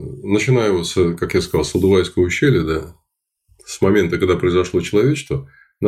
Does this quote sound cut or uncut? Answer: uncut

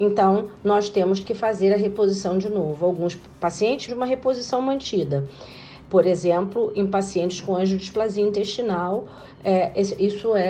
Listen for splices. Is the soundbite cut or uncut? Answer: cut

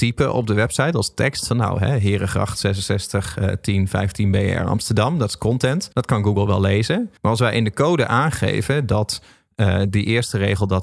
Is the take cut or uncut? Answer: cut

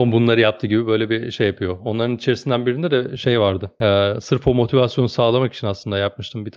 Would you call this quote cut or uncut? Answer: uncut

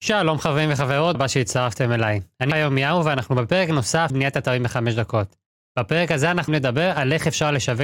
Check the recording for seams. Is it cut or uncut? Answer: cut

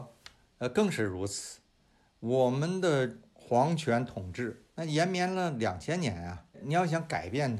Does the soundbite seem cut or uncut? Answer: cut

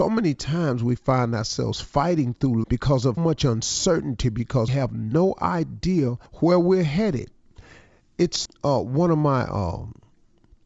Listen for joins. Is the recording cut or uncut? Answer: cut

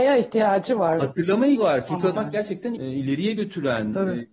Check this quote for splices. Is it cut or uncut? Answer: cut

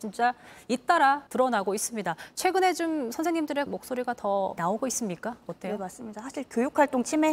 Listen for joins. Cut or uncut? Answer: cut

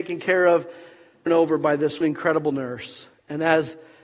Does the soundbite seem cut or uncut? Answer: cut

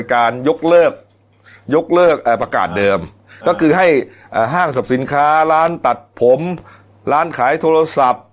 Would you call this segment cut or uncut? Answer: uncut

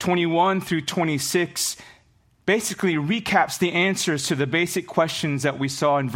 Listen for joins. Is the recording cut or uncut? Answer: uncut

